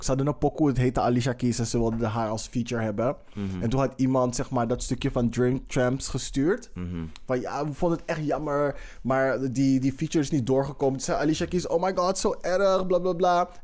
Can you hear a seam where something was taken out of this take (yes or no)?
no